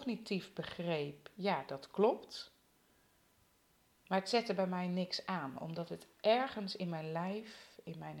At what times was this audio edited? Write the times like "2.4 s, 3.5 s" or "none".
none